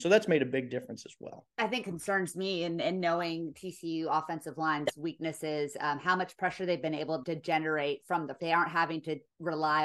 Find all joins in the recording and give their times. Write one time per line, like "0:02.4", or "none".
0:01.5
0:01.8
0:07.2
0:08.4